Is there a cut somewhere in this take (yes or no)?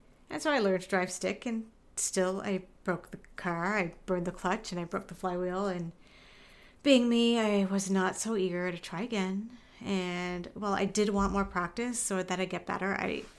no